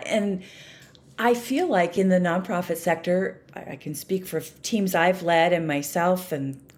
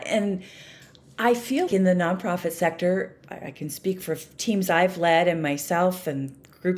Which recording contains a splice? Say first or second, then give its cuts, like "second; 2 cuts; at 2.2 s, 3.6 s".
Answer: second; 1 cut; at 1.7 s